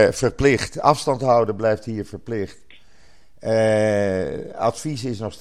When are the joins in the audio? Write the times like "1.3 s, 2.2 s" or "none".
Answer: none